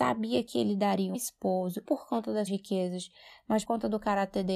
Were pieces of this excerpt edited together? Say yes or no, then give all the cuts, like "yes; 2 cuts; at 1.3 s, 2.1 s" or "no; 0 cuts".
yes; 4 cuts; at 1.1 s, 1.8 s, 2.5 s, 3.6 s